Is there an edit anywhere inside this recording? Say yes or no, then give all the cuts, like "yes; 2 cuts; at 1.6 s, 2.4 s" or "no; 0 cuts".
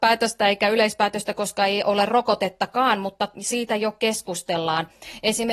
no; 0 cuts